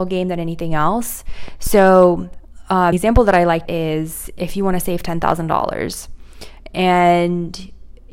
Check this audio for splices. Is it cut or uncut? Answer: cut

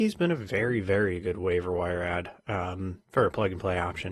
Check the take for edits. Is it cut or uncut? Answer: uncut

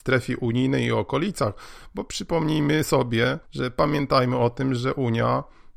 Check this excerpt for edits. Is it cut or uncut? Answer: cut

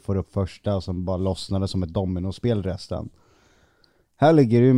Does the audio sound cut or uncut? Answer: uncut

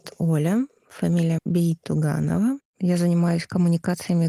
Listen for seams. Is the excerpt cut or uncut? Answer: cut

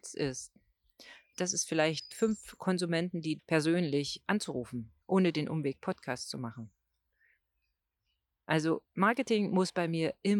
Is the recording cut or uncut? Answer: cut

